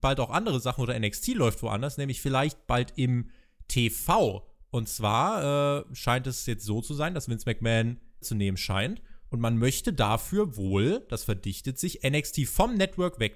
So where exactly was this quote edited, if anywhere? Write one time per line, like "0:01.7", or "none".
0:08.2

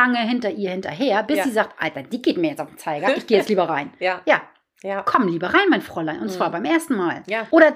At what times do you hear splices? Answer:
none

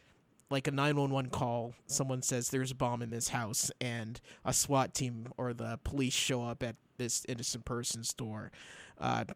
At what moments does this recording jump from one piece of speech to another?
none

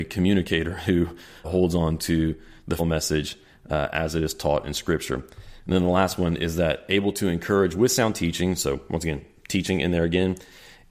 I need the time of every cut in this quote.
0:01.4
0:02.8

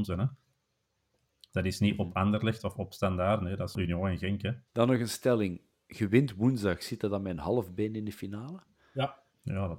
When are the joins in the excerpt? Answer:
0:03.7
0:04.7

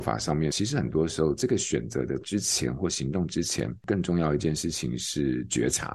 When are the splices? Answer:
none

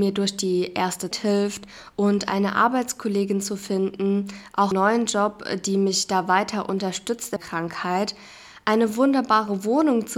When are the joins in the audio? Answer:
0:01.1
0:04.7
0:07.4

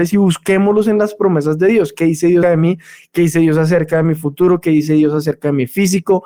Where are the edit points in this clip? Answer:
0:02.4

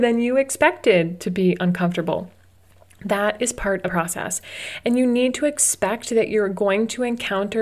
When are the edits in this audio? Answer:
0:03.9

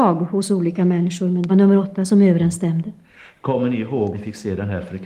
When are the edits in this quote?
0:01.5
0:04.1

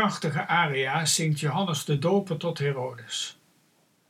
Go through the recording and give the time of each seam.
none

